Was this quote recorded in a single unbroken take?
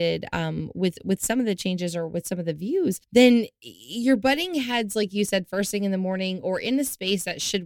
no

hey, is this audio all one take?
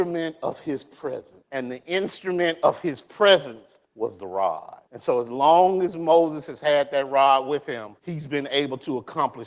no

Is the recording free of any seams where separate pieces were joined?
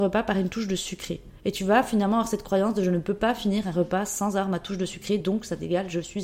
yes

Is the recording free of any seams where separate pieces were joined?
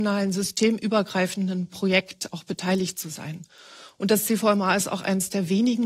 yes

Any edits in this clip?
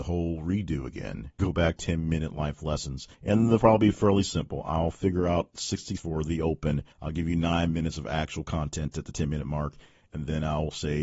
yes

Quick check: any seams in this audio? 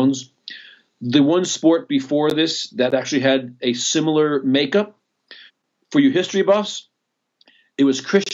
yes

